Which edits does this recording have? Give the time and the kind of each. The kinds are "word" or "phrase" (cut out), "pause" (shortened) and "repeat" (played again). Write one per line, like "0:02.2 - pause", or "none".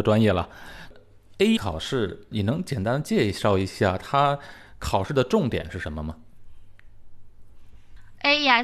0:01.6 - word
0:02.3 - word